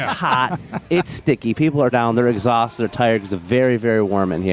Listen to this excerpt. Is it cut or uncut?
cut